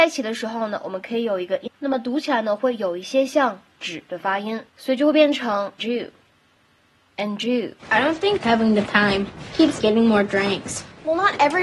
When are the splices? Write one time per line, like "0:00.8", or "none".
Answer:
0:01.7
0:04.7
0:05.8
0:07.8
0:08.4
0:08.9
0:09.8